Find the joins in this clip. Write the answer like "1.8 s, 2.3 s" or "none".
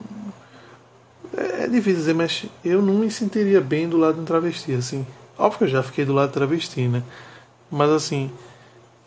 none